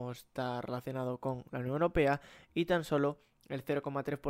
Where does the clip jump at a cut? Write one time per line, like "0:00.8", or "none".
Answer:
none